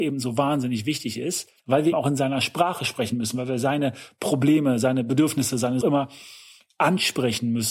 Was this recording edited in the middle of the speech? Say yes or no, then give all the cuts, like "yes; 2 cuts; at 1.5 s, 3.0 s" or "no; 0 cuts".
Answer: yes; 3 cuts; at 1.6 s, 1.9 s, 5.8 s